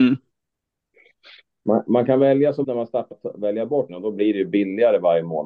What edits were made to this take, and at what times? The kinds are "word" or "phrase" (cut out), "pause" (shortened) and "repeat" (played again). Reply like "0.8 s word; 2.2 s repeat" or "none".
2.6 s word; 3.1 s word; 3.9 s word